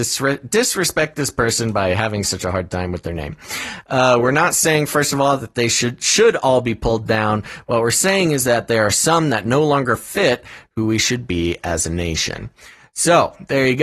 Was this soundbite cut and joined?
no; 0 cuts

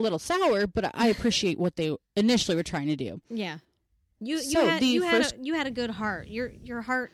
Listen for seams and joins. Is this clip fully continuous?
yes; 0 cuts

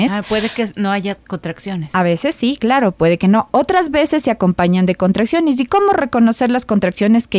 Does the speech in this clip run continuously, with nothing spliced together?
yes; 0 cuts

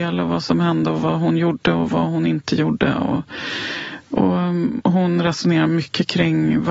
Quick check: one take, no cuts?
yes; 0 cuts

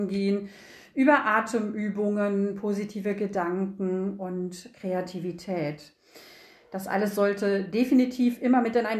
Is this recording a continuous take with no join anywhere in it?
yes; 0 cuts

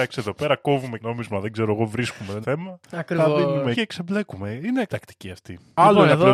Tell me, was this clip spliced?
yes; 4 cuts; at 1.0 s, 2.4 s, 3.7 s, 4.9 s

